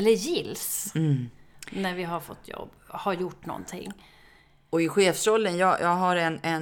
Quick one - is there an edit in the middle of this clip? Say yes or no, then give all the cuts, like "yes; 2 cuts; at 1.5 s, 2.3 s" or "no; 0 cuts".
no; 0 cuts